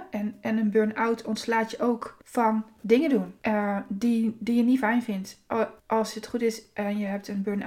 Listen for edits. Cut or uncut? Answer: cut